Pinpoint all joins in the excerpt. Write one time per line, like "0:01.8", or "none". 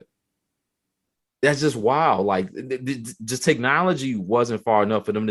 none